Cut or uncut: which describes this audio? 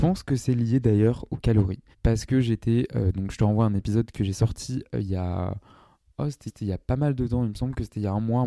cut